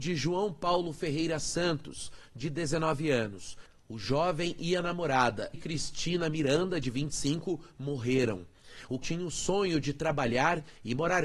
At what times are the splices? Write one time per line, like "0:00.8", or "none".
0:05.5
0:09.0